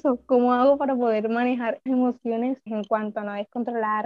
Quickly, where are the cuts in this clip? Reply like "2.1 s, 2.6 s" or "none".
1.9 s, 2.7 s